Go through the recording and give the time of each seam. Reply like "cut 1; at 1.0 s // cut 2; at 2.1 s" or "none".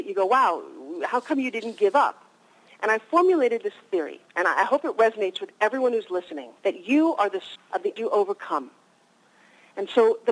cut 1; at 4.3 s // cut 2; at 6.6 s // cut 3; at 7.6 s // cut 4; at 8.0 s